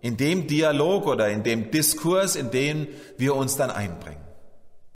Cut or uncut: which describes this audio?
uncut